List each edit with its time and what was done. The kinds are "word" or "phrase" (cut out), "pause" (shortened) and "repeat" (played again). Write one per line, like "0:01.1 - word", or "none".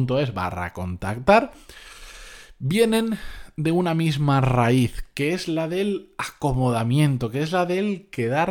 none